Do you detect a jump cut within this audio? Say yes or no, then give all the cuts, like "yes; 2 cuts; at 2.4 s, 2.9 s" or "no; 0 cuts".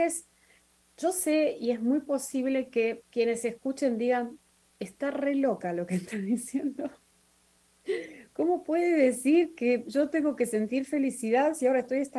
no; 0 cuts